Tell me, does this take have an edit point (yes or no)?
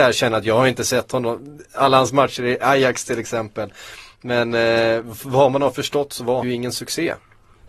yes